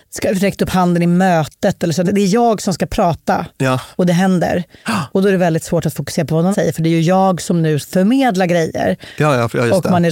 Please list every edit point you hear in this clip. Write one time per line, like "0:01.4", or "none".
0:02.0
0:03.9
0:06.5
0:07.8